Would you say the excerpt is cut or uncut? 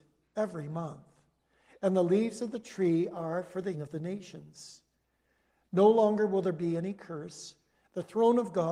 cut